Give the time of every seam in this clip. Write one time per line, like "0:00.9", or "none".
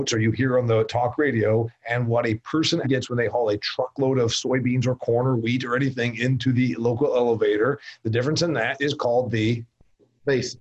0:02.8